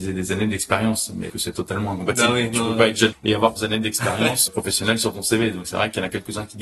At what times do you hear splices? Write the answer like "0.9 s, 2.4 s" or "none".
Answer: 1.3 s, 3.1 s, 3.6 s, 4.5 s